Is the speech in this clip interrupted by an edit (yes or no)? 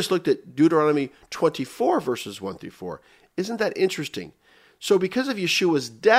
no